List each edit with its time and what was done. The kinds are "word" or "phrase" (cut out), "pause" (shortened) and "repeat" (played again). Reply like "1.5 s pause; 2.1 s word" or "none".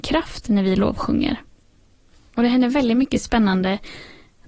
none